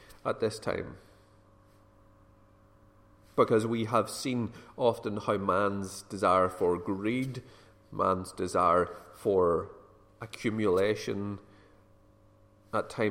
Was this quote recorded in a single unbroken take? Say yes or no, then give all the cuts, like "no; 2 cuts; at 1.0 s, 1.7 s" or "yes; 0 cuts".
yes; 0 cuts